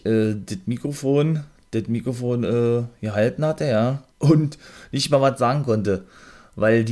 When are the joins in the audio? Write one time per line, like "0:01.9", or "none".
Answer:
0:04.1